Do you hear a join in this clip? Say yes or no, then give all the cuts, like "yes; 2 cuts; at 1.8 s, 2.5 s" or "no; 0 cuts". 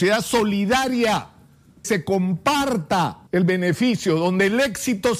yes; 2 cuts; at 1.8 s, 3.3 s